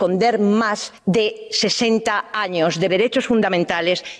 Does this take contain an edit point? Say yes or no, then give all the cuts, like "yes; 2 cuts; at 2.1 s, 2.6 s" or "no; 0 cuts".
yes; 2 cuts; at 1.0 s, 2.9 s